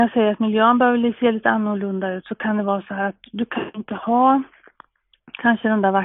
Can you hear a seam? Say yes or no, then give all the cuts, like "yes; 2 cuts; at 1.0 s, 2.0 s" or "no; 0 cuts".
no; 0 cuts